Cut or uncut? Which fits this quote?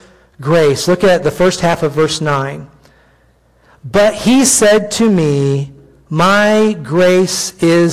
uncut